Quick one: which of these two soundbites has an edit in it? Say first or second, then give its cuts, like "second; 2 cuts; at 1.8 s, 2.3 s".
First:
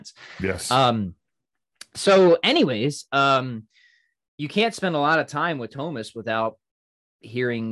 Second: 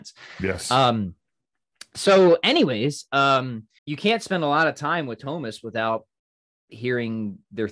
second; 1 cut; at 3.8 s